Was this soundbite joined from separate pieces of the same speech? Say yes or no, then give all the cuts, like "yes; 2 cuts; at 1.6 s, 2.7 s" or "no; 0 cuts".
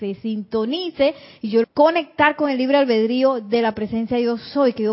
yes; 1 cut; at 1.6 s